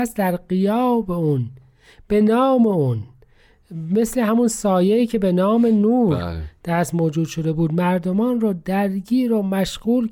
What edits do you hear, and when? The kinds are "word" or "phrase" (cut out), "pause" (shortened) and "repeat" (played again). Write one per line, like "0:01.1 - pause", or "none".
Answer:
none